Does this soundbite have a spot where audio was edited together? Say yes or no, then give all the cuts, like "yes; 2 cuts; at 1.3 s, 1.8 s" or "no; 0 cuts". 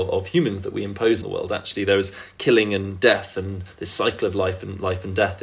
yes; 1 cut; at 1.2 s